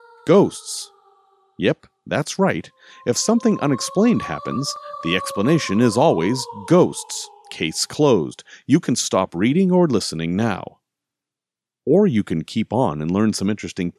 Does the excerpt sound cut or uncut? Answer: uncut